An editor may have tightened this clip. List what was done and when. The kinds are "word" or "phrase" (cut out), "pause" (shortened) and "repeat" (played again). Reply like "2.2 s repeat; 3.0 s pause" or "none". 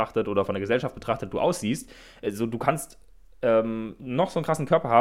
none